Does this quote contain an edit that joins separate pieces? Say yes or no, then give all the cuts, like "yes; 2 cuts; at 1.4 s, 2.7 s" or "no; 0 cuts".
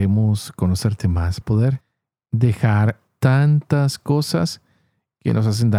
yes; 2 cuts; at 1.4 s, 3.1 s